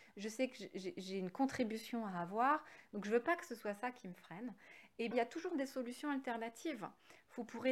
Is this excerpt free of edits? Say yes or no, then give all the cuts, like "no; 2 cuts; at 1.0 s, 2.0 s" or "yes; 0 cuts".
no; 1 cut; at 5.1 s